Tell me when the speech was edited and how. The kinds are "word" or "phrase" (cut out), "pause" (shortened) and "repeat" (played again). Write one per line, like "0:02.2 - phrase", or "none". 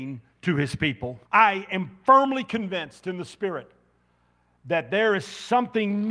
0:01.3 - pause